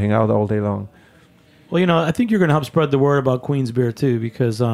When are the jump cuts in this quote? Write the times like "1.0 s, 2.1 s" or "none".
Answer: none